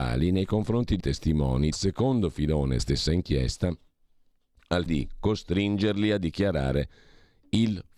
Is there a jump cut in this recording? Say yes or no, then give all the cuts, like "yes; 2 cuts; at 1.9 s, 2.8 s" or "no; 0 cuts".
yes; 4 cuts; at 1.0 s, 1.7 s, 2.8 s, 4.9 s